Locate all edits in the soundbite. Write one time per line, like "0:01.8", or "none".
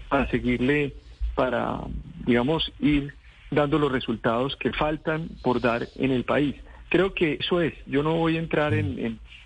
0:07.4